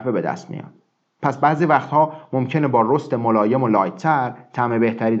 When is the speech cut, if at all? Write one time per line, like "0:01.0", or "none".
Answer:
none